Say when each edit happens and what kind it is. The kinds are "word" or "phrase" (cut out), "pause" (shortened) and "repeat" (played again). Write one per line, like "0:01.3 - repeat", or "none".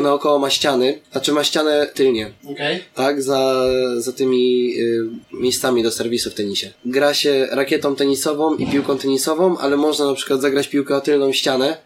0:01.9 - phrase